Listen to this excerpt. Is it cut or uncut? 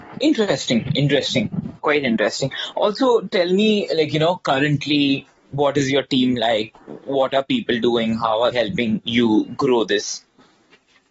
cut